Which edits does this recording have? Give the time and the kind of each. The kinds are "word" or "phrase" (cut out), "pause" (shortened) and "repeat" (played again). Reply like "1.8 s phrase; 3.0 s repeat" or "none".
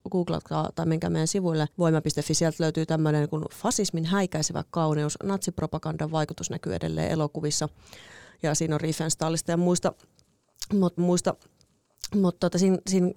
1.7 s pause; 11.0 s repeat